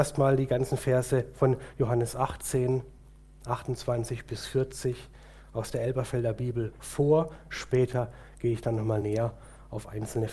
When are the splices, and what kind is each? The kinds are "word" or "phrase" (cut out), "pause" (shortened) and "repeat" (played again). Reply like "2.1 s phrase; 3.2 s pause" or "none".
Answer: none